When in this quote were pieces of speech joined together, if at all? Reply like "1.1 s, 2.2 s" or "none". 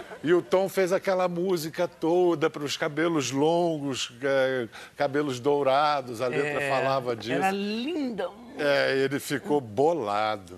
none

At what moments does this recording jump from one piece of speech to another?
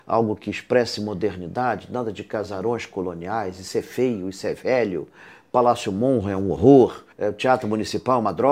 7.1 s

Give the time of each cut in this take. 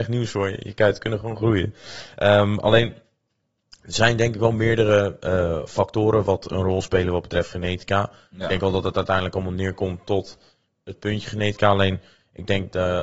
none

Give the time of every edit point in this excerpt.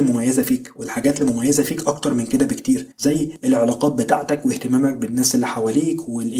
2.9 s

